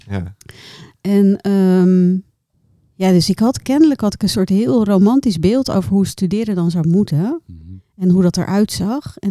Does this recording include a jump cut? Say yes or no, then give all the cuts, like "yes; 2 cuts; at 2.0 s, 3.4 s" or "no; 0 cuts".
no; 0 cuts